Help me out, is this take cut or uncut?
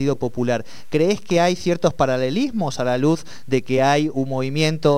uncut